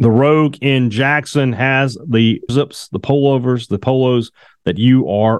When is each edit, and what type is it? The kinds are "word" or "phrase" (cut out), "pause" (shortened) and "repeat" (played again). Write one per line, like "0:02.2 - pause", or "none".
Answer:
0:02.5 - word